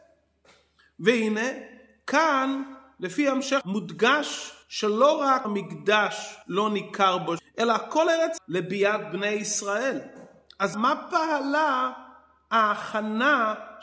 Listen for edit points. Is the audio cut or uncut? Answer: cut